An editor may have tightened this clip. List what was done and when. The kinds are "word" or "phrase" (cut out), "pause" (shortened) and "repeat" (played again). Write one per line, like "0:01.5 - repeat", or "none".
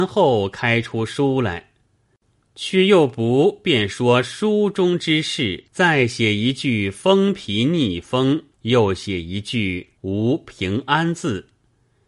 0:05.7 - pause
0:08.5 - pause
0:10.0 - pause